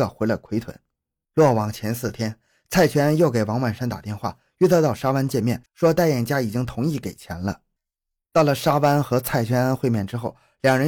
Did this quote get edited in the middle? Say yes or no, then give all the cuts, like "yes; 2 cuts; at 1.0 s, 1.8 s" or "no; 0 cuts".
no; 0 cuts